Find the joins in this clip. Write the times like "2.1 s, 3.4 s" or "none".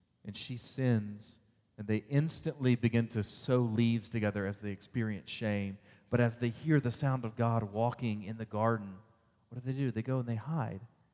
none